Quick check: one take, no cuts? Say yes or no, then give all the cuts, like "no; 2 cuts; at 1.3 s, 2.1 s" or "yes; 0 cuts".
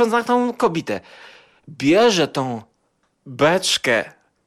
yes; 0 cuts